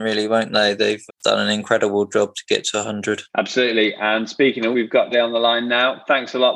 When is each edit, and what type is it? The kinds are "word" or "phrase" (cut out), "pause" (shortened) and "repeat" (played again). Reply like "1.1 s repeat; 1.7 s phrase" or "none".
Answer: 1.1 s word; 3.3 s pause; 4.7 s word; 5.1 s word